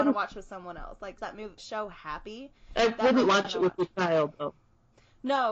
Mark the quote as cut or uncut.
cut